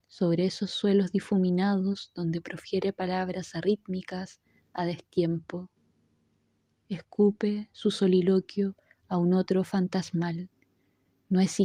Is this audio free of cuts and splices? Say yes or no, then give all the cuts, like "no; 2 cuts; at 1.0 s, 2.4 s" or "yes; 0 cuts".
yes; 0 cuts